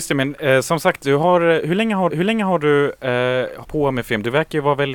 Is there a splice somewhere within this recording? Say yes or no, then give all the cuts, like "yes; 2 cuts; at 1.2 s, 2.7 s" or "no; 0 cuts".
yes; 2 cuts; at 2.1 s, 3.6 s